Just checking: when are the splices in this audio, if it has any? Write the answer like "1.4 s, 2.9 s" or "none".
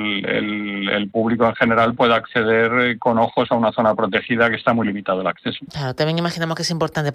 none